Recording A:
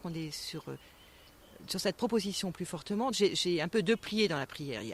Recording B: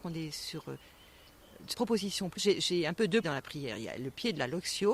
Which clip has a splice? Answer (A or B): B